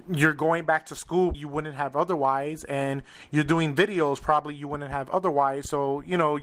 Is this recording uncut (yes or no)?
no